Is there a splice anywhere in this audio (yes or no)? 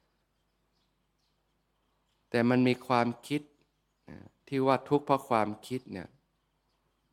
no